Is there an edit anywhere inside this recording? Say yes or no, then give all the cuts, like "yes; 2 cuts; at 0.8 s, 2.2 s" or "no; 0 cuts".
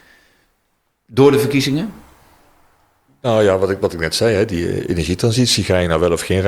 no; 0 cuts